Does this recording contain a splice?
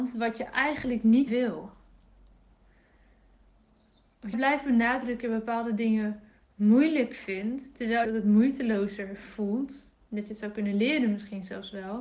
yes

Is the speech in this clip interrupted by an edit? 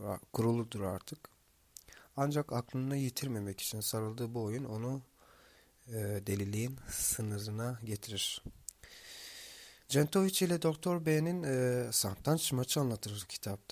no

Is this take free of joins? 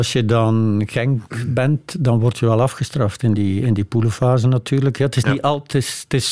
yes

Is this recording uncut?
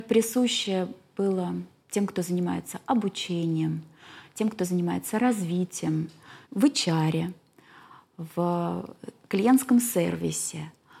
no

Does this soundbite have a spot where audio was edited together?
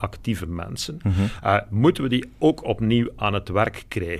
no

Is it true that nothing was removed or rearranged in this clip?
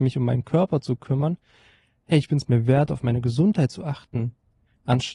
yes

